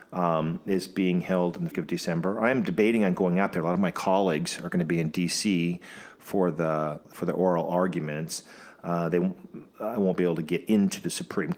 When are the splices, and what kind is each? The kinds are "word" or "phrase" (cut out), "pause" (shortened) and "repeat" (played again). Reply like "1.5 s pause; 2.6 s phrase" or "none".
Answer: 1.7 s phrase; 7.0 s word